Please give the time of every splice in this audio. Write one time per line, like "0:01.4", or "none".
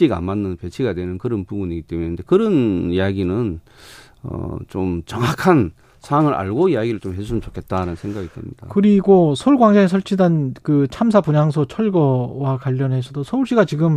none